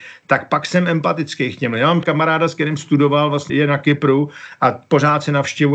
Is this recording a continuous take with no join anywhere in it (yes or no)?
no